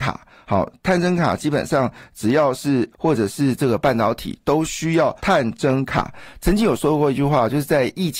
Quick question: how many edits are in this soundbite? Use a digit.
2